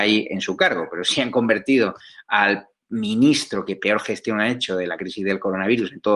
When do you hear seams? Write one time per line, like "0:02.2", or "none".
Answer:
none